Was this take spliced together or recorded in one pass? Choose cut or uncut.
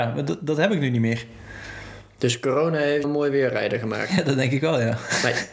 cut